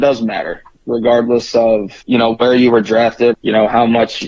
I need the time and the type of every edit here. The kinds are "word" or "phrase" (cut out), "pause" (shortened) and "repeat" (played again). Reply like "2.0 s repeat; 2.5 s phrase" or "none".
2.0 s pause; 3.3 s word